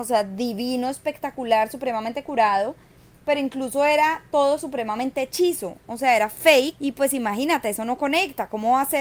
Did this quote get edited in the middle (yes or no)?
no